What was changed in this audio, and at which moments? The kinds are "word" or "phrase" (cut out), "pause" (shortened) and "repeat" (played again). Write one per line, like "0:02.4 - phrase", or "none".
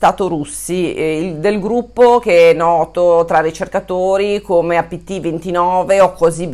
none